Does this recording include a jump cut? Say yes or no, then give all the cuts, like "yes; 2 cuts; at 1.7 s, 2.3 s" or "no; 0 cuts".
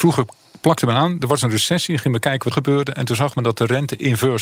yes; 1 cut; at 2.5 s